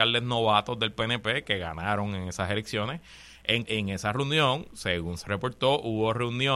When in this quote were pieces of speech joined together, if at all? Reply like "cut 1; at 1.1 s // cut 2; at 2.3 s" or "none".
cut 1; at 3.7 s